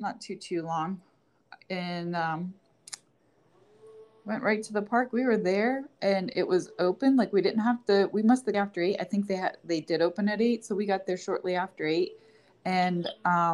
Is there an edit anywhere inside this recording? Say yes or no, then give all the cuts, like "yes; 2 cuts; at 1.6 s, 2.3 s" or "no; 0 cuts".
yes; 1 cut; at 8.5 s